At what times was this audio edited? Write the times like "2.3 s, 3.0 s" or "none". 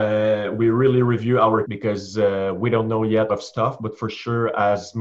1.6 s, 3.3 s